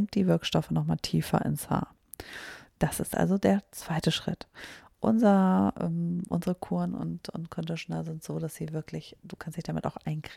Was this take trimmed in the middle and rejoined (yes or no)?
yes